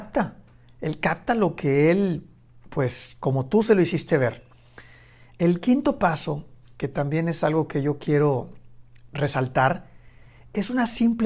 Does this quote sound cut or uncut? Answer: uncut